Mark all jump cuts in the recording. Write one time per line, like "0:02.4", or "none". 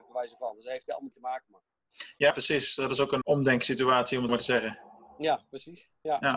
0:01.1
0:01.4
0:02.3
0:03.2
0:04.3